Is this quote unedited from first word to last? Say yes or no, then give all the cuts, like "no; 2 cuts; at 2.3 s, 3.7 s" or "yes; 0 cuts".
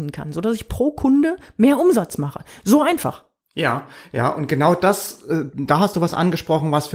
yes; 0 cuts